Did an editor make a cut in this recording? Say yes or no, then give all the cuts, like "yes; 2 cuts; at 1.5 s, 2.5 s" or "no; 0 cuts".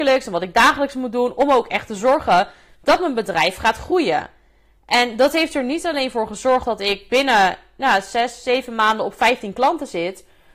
no; 0 cuts